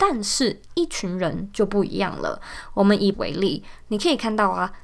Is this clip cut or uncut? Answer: cut